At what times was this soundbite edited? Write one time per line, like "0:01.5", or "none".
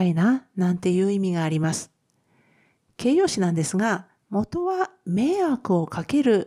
none